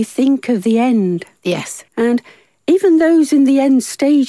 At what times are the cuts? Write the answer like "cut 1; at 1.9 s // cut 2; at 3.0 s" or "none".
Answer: cut 1; at 1.9 s